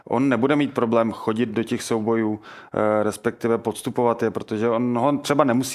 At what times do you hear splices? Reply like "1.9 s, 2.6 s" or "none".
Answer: none